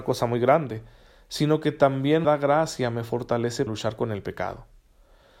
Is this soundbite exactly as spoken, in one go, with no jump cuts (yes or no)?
no